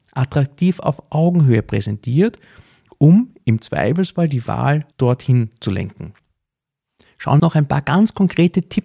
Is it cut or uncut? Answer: cut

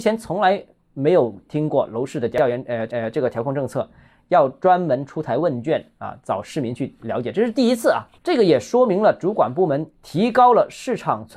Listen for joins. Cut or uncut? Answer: cut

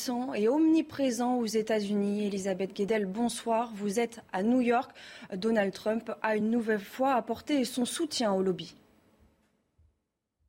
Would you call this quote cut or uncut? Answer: uncut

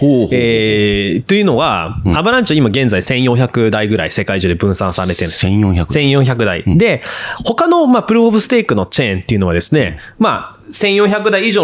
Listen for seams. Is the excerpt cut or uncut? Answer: uncut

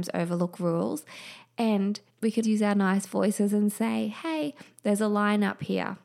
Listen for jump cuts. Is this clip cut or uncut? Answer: cut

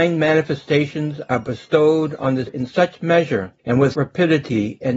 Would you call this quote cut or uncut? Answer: cut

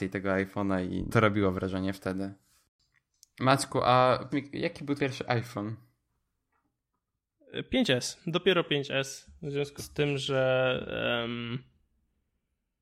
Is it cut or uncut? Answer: cut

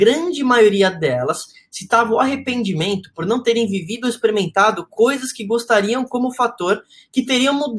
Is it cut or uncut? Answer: uncut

